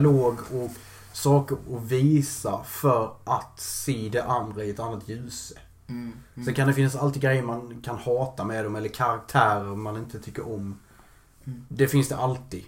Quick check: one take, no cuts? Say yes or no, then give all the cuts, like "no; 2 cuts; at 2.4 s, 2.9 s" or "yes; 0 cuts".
yes; 0 cuts